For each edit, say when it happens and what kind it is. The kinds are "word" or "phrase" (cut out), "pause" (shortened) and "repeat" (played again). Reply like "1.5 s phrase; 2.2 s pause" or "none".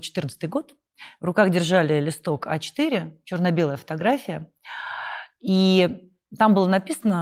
none